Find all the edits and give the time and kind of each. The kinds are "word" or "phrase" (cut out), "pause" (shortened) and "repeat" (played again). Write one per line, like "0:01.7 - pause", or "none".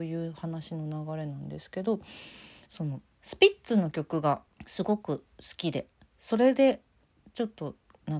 0:04.5 - pause